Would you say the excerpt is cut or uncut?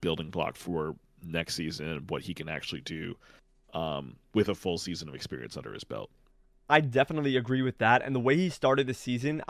uncut